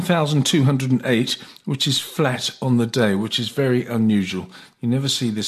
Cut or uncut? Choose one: uncut